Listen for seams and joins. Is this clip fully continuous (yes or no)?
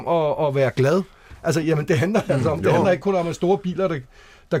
yes